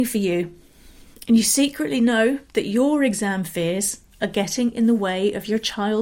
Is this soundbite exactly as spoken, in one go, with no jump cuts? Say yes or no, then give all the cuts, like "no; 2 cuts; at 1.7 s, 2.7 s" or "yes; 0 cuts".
no; 1 cut; at 2.4 s